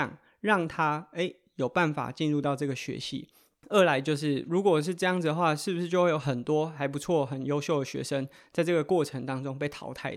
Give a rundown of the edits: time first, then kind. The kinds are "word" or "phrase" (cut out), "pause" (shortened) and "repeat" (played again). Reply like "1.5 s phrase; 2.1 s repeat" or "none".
none